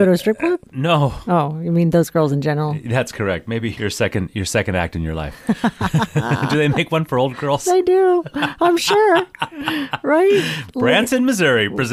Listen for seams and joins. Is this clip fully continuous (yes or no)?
no